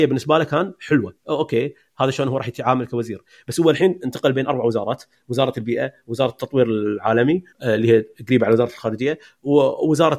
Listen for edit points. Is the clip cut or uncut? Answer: cut